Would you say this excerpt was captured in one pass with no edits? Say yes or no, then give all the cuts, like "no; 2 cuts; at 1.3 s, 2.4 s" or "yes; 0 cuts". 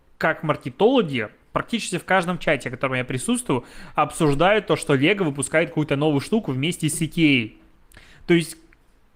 yes; 0 cuts